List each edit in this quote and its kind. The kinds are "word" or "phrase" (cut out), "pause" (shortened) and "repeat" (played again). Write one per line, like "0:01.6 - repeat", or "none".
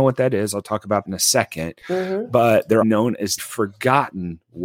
0:01.0 - word
0:02.8 - word
0:03.4 - word